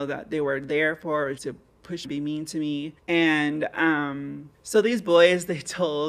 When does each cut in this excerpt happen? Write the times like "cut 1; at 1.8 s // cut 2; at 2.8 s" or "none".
cut 1; at 1.4 s // cut 2; at 2.0 s // cut 3; at 3.0 s // cut 4; at 4.5 s